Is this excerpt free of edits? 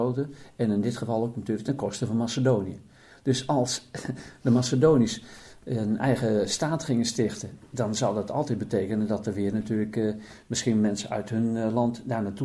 yes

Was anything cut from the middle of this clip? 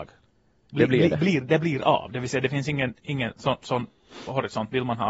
no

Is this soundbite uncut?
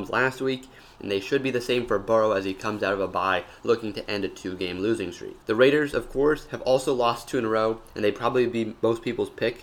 no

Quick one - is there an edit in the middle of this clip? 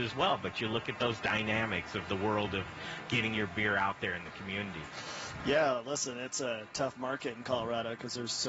no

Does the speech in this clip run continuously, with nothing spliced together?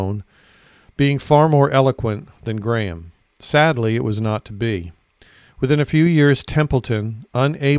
yes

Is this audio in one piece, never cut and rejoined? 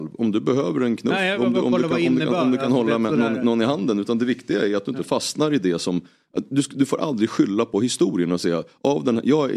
yes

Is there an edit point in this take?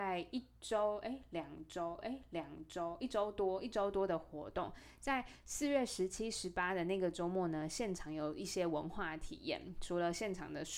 yes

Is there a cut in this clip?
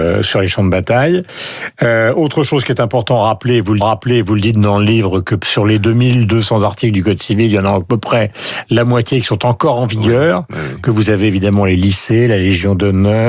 yes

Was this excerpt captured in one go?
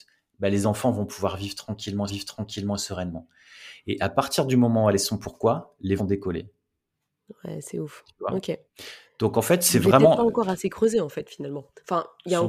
no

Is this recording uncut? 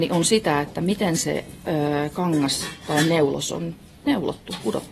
yes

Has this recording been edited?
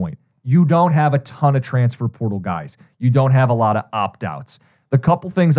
no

